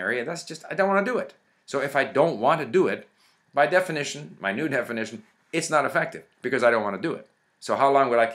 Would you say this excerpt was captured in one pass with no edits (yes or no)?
yes